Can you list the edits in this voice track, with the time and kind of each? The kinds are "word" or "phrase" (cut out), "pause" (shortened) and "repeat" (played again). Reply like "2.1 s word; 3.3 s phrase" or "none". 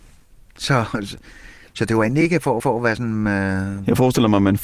2.6 s repeat